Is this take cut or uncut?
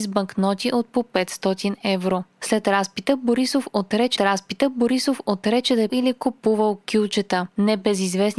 cut